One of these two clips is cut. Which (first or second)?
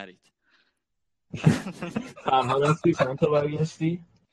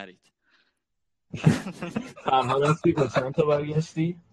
first